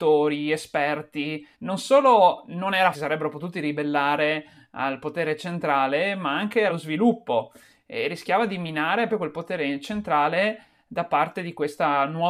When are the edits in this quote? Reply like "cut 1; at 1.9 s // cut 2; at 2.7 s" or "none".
cut 1; at 1.5 s // cut 2; at 2.9 s // cut 3; at 6.7 s // cut 4; at 9.1 s